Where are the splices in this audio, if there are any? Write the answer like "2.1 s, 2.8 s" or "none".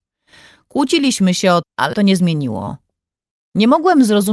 1.6 s, 1.9 s